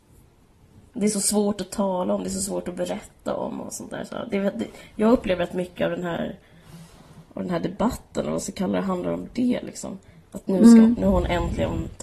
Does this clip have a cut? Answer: no; 0 cuts

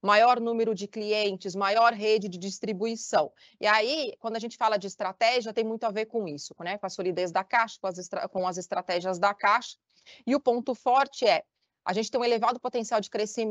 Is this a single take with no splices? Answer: yes; 0 cuts

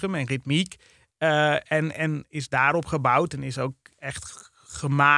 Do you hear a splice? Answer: no; 0 cuts

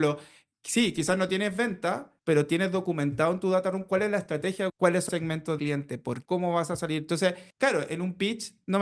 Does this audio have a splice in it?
yes; 6 cuts; at 2.2 s, 4.7 s, 5.1 s, 5.6 s, 6.2 s, 7.5 s

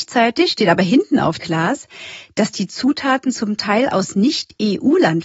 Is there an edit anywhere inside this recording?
yes; 1 cut; at 1.4 s

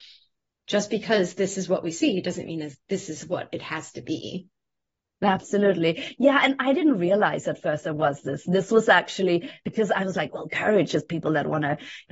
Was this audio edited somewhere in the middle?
no; 0 cuts

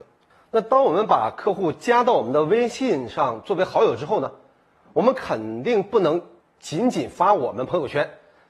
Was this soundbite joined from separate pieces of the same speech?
yes; 1 cut; at 6.4 s

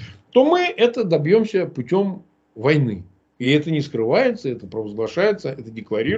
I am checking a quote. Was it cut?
no; 0 cuts

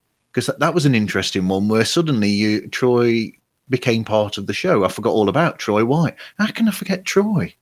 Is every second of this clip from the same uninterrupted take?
yes; 0 cuts

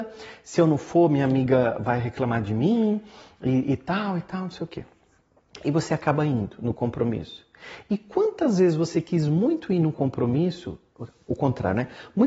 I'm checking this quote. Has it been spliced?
no; 0 cuts

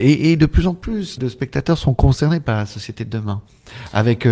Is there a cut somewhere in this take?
yes; 1 cut; at 1.2 s

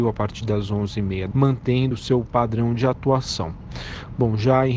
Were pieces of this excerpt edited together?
yes; 2 cuts; at 1.3 s, 1.9 s

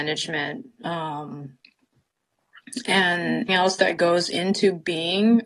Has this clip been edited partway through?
yes; 1 cut; at 3.5 s

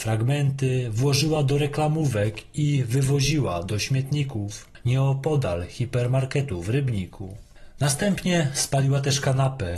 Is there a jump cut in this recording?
no; 0 cuts

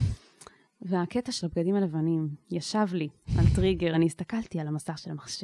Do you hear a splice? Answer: no; 0 cuts

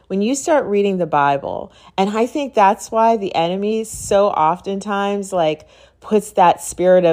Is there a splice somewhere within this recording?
no; 0 cuts

